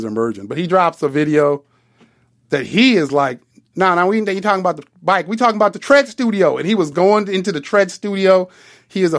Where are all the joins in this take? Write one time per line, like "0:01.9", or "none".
none

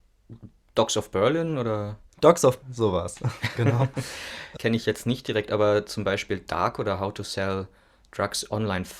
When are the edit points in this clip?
0:02.1
0:02.6
0:04.6

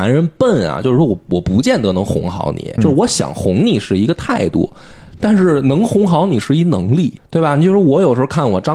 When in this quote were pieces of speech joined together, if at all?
0:02.8
0:07.2

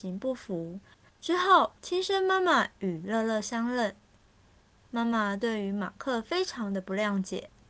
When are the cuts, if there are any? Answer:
0:01.1
0:01.8

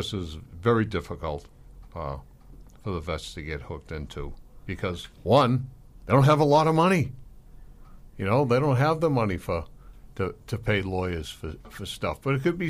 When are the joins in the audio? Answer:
0:05.2

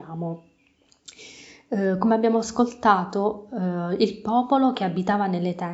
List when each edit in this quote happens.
none

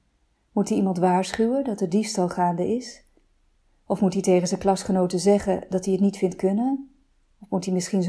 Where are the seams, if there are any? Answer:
none

